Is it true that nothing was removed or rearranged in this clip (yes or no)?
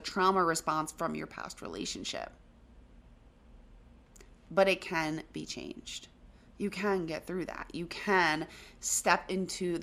yes